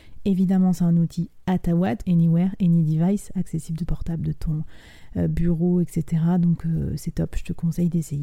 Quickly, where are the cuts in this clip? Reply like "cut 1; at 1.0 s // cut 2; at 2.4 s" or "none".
cut 1; at 2.0 s // cut 2; at 3.9 s